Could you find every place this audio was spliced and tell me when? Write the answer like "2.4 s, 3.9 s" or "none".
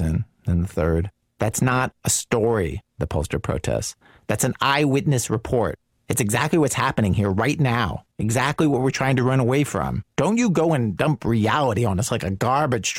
1.2 s, 8.1 s, 10.1 s